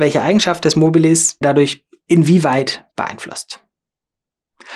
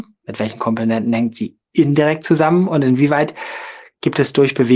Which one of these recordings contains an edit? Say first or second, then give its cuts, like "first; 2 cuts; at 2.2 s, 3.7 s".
first; 2 cuts; at 1.4 s, 2.9 s